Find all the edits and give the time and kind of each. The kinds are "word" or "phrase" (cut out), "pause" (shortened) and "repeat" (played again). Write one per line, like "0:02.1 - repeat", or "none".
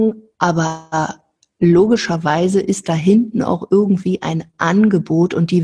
none